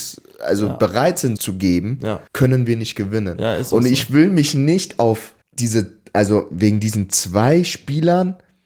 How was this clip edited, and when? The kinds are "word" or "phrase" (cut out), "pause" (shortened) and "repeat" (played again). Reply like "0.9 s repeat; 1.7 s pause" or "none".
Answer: 1.4 s phrase; 2.3 s pause; 5.4 s pause